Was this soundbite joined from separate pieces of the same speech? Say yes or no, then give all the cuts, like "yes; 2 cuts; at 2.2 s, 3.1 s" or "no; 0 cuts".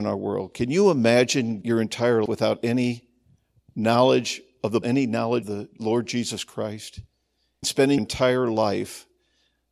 yes; 6 cuts; at 1.6 s, 2.3 s, 4.8 s, 5.4 s, 7.6 s, 8.0 s